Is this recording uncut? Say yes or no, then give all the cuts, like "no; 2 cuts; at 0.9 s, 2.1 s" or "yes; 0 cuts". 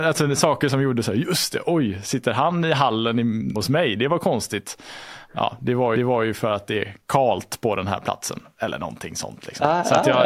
no; 3 cuts; at 3.6 s, 6.0 s, 7.0 s